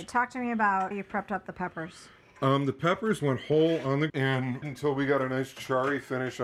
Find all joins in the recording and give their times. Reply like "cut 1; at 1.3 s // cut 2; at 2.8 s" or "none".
cut 1; at 0.9 s // cut 2; at 3.2 s // cut 3; at 4.1 s // cut 4; at 4.6 s

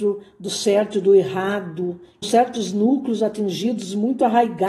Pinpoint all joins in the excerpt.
cut 1; at 2.2 s

